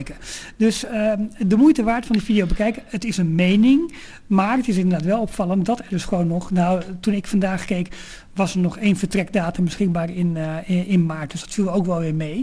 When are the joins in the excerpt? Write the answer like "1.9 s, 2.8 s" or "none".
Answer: none